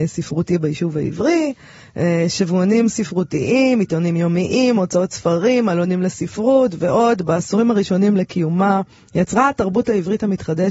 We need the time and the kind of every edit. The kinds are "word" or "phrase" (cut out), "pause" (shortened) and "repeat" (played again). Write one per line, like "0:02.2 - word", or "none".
none